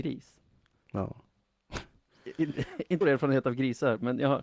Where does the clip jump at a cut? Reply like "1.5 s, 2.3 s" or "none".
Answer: 3.0 s